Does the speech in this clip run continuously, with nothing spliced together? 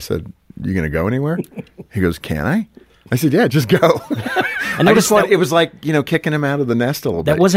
yes; 0 cuts

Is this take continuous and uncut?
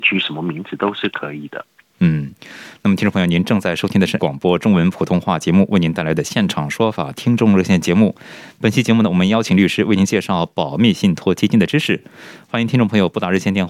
no; 1 cut; at 4.2 s

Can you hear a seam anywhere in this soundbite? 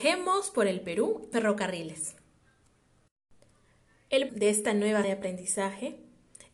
yes; 3 cuts; at 1.3 s, 4.3 s, 5.0 s

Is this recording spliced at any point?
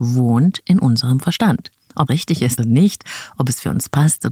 yes; 2 cuts; at 2.1 s, 2.6 s

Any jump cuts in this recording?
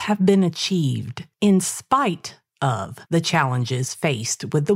yes; 2 cuts; at 1.3 s, 3.1 s

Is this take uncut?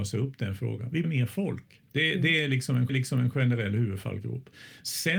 no; 3 cuts; at 1.0 s, 1.9 s, 2.9 s

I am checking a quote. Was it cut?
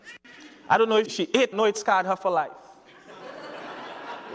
yes; 2 cuts; at 1.1 s, 1.5 s

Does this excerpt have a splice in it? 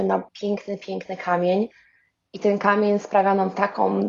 no; 0 cuts

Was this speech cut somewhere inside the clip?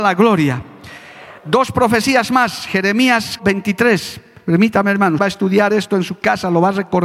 yes; 3 cuts; at 1.4 s, 3.4 s, 5.2 s

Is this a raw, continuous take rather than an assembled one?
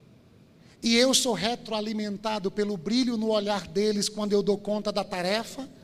yes; 0 cuts

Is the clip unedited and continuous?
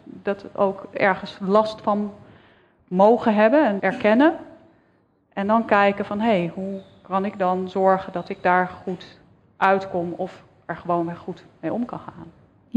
no; 1 cut; at 3.8 s

